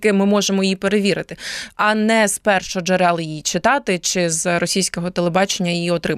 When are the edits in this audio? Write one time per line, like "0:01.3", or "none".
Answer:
none